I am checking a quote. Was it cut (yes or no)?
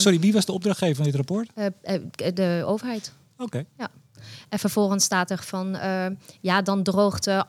no